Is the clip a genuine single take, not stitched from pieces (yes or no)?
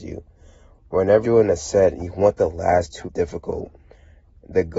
no